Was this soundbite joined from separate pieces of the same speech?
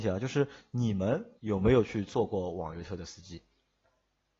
yes; 1 cut; at 1.4 s

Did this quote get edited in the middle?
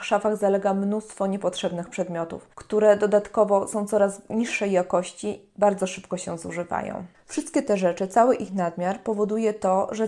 yes; 2 cuts; at 2.5 s, 7.1 s

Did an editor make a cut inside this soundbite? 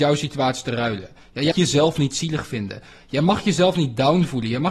yes; 1 cut; at 1.5 s

